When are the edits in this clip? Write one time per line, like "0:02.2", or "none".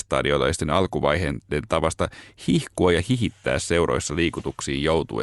none